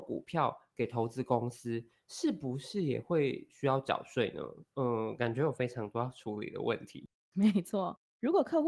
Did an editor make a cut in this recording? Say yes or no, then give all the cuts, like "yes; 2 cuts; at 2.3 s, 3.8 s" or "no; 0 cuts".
no; 0 cuts